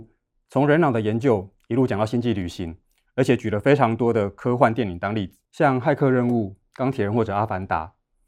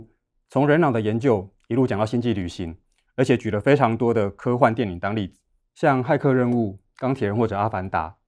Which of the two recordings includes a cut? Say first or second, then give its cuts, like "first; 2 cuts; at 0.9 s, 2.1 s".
first; 1 cut; at 5.4 s